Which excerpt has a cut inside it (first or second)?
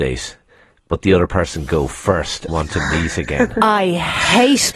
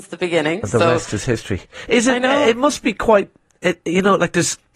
first